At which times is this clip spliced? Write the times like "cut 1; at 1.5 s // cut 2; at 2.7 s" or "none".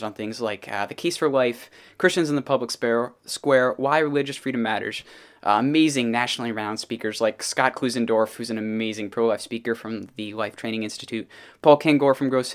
none